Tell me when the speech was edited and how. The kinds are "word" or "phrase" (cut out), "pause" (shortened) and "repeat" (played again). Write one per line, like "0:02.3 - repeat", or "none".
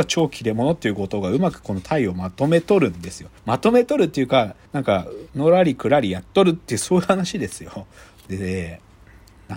0:03.4 - pause
0:04.7 - pause
0:08.0 - pause